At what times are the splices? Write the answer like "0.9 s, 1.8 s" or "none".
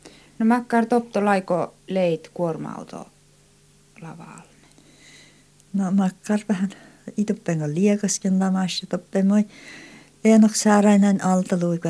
1.8 s